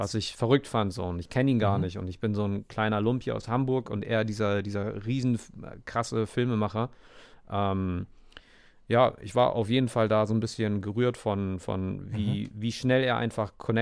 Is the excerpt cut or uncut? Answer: uncut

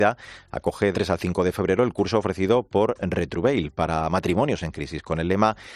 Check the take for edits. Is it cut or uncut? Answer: cut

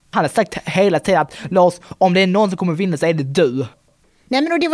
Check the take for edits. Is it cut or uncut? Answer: uncut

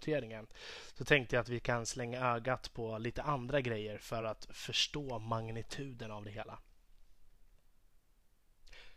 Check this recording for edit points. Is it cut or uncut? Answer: uncut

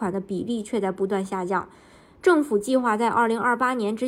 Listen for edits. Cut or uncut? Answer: uncut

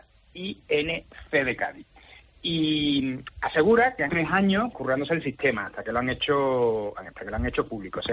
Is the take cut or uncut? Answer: cut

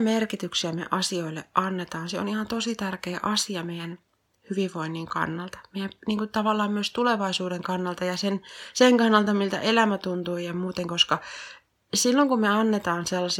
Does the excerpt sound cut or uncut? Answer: uncut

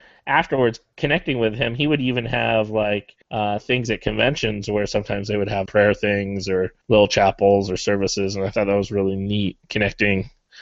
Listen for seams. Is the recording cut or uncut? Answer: cut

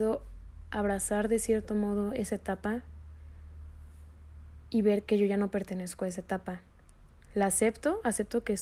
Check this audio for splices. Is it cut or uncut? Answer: uncut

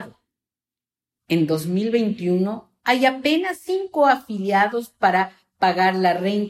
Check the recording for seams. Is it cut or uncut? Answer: uncut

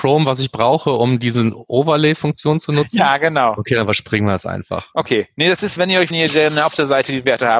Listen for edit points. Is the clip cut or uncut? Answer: cut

